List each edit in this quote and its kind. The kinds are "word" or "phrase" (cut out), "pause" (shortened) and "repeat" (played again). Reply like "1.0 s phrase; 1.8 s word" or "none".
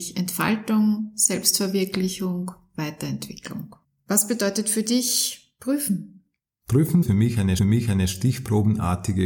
3.8 s pause; 7.0 s word; 7.6 s repeat